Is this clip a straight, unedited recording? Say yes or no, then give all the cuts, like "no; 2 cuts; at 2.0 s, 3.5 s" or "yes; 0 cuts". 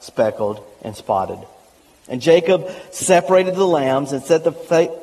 yes; 0 cuts